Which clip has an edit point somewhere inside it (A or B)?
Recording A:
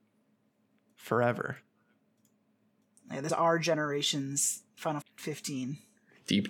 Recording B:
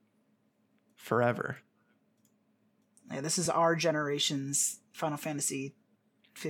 A